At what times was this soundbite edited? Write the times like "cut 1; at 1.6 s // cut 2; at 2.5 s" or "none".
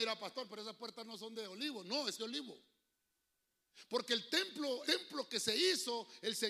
cut 1; at 2.2 s // cut 2; at 4.8 s

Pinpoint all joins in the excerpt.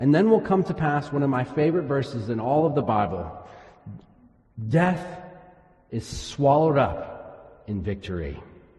none

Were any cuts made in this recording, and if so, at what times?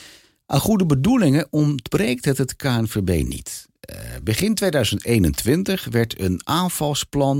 none

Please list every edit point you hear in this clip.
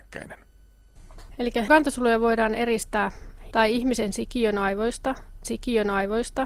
cut 1; at 1.7 s // cut 2; at 3.5 s // cut 3; at 5.4 s

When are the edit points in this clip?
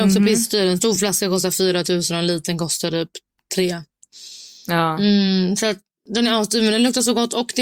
none

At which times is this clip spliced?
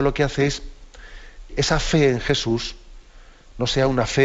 cut 1; at 1.5 s

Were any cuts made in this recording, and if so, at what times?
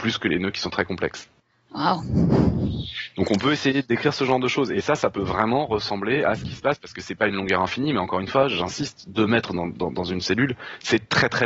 none

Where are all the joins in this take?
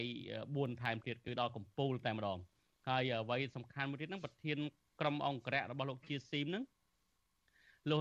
none

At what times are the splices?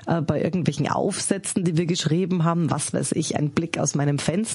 none

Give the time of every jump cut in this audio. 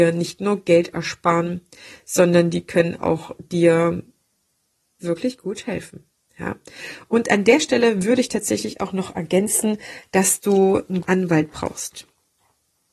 cut 1; at 3.0 s // cut 2; at 5.0 s // cut 3; at 11.0 s

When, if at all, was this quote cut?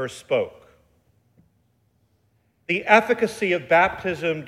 none

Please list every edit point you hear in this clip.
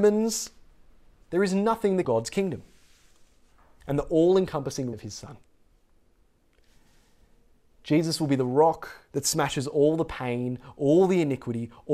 cut 1; at 2.0 s // cut 2; at 4.9 s // cut 3; at 9.1 s

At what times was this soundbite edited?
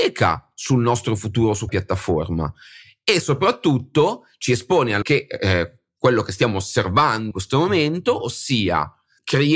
cut 1; at 1.7 s // cut 2; at 5.0 s // cut 3; at 7.3 s

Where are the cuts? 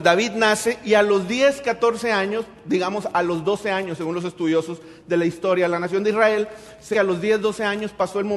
cut 1; at 6.9 s

